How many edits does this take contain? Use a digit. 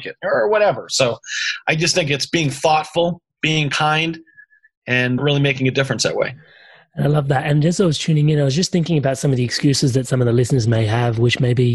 1